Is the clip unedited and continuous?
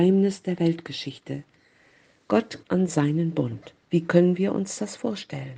no; 2 cuts; at 2.6 s, 3.8 s

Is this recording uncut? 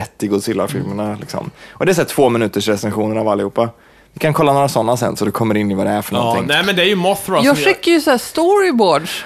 yes; 0 cuts

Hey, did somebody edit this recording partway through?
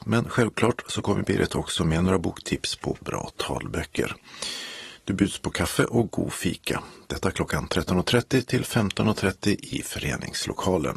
no; 0 cuts

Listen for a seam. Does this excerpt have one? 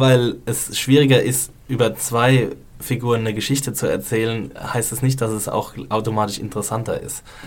no; 0 cuts

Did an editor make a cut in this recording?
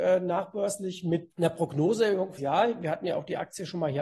yes; 2 cuts; at 1.3 s, 2.4 s

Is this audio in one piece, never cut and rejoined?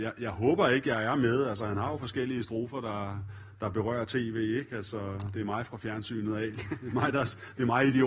yes; 0 cuts

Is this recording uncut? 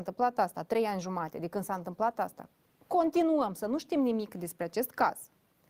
yes; 0 cuts

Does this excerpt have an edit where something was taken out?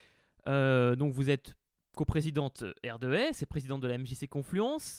no; 0 cuts

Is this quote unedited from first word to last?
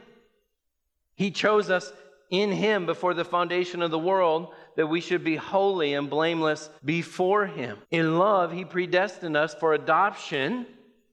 no; 2 cuts; at 6.8 s, 7.8 s

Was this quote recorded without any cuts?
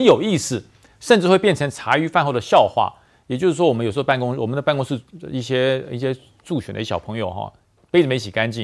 yes; 0 cuts

